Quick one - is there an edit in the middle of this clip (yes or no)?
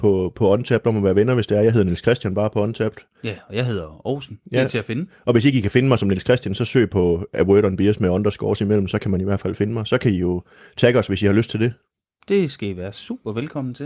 no